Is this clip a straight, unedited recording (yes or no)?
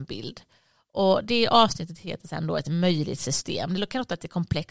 yes